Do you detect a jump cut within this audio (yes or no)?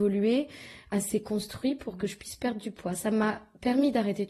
no